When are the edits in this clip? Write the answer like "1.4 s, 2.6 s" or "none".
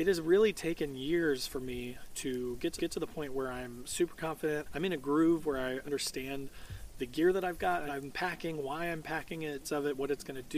2.8 s, 5.8 s, 7.9 s, 9.6 s